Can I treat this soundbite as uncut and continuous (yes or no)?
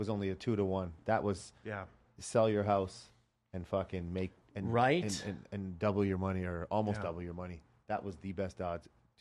yes